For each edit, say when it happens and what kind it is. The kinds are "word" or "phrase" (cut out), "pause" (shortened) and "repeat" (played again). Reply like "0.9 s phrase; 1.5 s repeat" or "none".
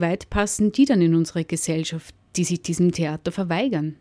none